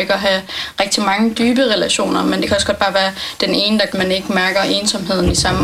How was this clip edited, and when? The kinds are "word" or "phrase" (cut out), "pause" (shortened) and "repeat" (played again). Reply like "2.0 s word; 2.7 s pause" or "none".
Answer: 3.9 s word

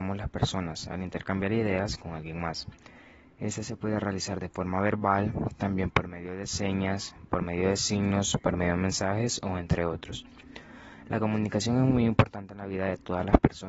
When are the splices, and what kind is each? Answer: none

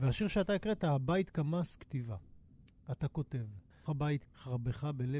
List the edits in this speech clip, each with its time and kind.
1.8 s word; 3.9 s word; 4.3 s word

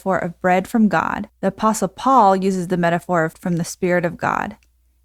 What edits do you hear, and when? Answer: 1.3 s pause; 3.3 s word

